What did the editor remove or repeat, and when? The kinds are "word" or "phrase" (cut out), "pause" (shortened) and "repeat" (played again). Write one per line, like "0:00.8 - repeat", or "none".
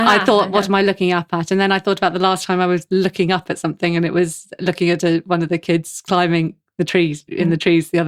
none